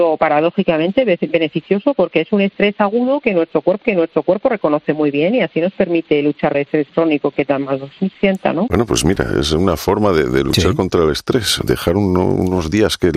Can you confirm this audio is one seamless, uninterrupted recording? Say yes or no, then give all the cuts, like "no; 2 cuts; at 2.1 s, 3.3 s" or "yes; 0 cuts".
no; 2 cuts; at 3.8 s, 6.5 s